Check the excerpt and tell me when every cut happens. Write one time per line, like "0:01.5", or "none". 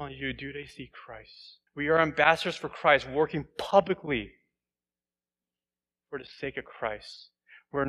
0:01.7